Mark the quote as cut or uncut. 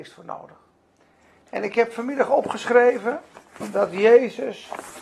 uncut